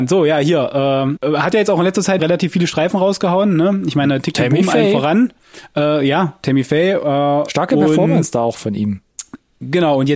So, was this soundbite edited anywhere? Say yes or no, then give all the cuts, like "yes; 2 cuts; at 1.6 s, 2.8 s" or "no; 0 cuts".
yes; 2 cuts; at 1.2 s, 2.2 s